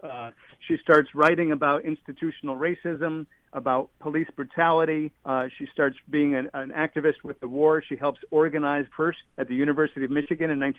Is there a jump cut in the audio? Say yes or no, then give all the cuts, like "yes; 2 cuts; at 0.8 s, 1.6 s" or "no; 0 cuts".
yes; 3 cuts; at 5.2 s, 8.9 s, 9.2 s